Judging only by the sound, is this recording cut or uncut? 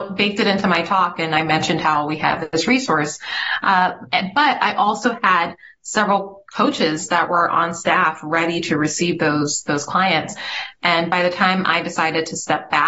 cut